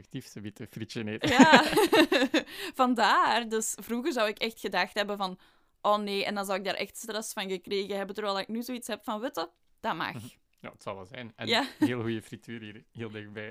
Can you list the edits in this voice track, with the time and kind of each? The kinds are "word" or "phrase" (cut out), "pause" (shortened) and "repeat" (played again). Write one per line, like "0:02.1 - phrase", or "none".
none